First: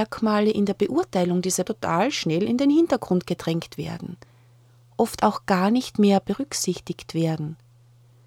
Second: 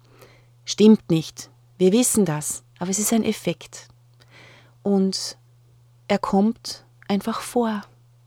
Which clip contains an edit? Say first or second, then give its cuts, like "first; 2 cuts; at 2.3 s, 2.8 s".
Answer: first; 1 cut; at 1.7 s